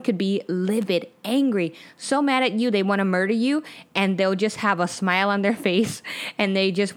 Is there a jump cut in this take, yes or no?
no